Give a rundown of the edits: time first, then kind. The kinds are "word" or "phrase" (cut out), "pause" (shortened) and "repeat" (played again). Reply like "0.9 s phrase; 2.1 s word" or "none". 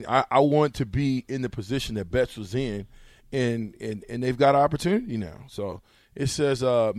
none

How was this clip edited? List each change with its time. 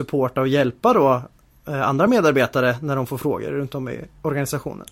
none

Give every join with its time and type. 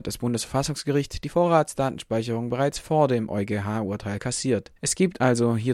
4.8 s pause

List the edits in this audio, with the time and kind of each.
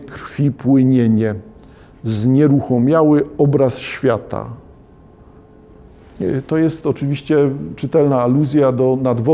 none

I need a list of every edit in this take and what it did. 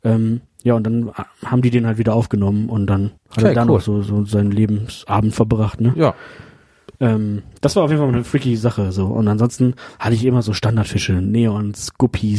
3.2 s pause

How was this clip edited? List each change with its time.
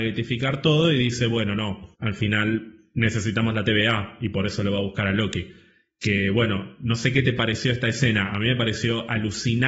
1.9 s pause

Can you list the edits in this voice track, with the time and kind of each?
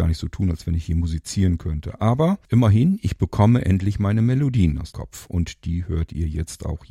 2.4 s pause; 4.9 s word

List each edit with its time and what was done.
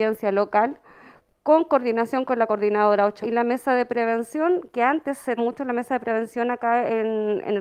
3.2 s phrase; 5.4 s word

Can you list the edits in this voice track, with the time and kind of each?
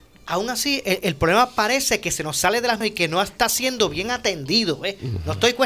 2.8 s word

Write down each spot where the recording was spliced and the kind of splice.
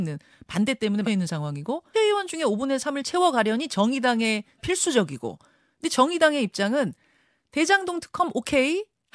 1.0 s word; 1.9 s word; 4.6 s word

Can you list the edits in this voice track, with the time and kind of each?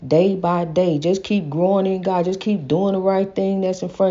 none

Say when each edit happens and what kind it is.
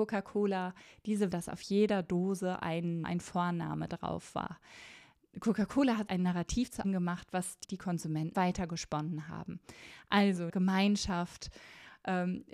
1.3 s word; 3.0 s word; 6.1 s word; 6.8 s word; 7.6 s word; 8.3 s word; 10.5 s word

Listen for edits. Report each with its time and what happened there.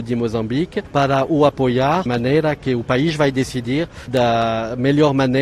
2.1 s word; 4.1 s word

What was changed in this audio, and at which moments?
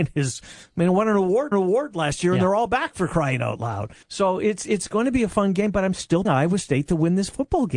1.5 s repeat; 4.0 s pause; 6.2 s word

